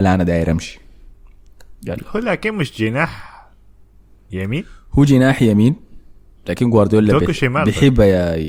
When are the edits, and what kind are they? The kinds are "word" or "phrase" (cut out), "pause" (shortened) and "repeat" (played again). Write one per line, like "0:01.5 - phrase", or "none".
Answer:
none